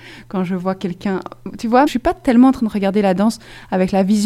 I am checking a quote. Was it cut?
yes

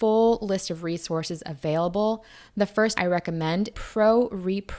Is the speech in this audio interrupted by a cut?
yes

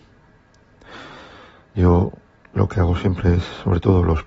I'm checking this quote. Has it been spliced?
no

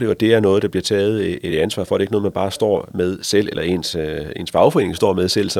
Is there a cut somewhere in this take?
no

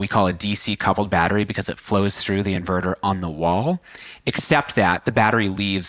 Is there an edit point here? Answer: no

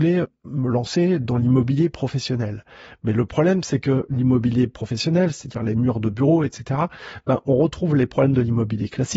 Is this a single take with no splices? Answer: yes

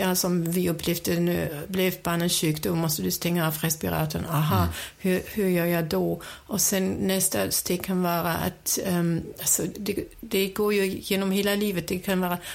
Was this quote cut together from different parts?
no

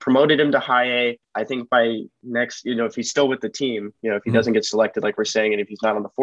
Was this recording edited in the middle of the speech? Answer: yes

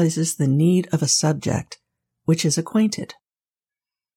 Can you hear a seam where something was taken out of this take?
no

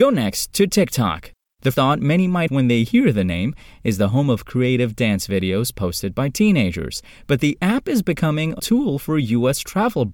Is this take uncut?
no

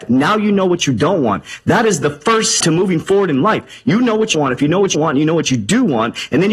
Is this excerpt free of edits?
no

